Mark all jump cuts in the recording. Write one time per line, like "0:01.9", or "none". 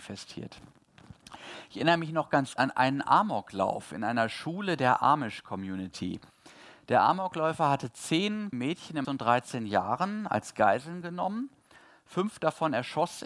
0:02.6
0:08.5
0:09.0